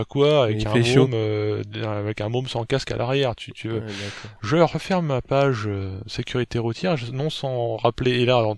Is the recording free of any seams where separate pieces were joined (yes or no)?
yes